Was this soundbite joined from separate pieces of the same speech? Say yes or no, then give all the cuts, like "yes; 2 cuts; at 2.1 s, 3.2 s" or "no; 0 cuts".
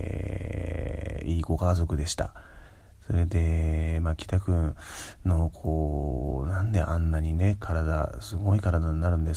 no; 0 cuts